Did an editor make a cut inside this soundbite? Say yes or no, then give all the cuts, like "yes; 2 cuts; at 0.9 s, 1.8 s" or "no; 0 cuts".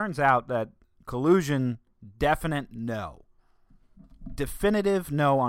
no; 0 cuts